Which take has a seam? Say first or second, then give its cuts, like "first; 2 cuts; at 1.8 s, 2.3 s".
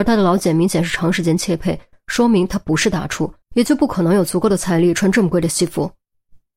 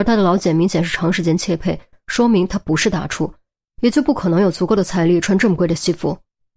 first; 1 cut; at 3.4 s